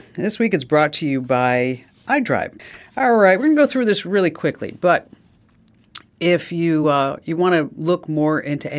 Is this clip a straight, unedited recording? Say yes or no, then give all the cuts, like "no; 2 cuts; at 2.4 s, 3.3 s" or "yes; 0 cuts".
yes; 0 cuts